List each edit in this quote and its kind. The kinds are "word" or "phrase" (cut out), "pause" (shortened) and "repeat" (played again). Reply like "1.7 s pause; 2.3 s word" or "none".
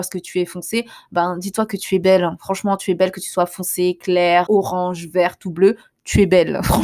4.5 s word